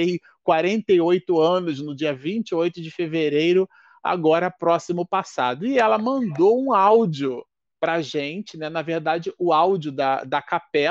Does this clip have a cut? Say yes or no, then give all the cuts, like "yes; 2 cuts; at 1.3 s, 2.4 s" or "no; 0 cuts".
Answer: no; 0 cuts